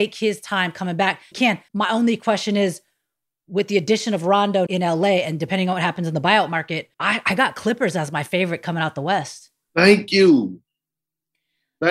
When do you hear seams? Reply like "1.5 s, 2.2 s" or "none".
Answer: 1.3 s, 1.7 s, 4.7 s, 6.9 s